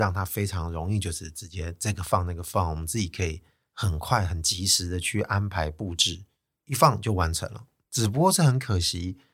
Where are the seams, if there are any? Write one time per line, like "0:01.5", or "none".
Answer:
0:07.8